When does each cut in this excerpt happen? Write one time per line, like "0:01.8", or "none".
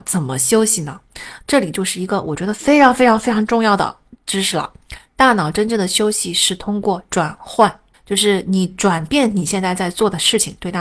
0:07.9